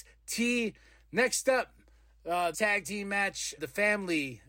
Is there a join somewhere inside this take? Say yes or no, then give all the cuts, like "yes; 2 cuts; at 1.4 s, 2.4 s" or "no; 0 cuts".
yes; 2 cuts; at 2.5 s, 3.6 s